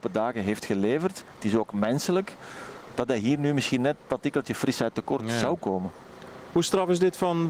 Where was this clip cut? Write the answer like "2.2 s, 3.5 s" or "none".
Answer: none